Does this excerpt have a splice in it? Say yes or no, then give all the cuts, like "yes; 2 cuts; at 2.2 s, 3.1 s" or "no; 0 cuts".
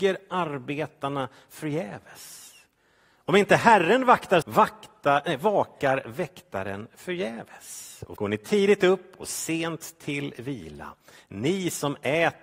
yes; 2 cuts; at 4.4 s, 8.2 s